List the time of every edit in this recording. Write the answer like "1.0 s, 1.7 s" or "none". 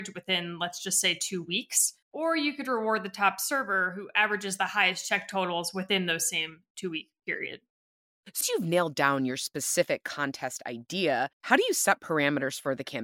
2.0 s, 8.4 s, 11.3 s